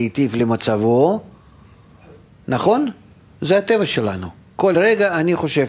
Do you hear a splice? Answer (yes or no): no